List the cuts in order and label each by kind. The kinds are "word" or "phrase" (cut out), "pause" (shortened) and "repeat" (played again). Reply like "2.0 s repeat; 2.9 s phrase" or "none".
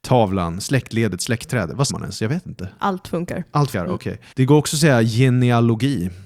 1.9 s word; 3.7 s word; 4.3 s pause